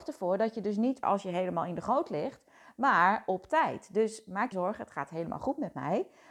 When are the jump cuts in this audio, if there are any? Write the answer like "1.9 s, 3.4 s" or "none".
1.0 s, 4.5 s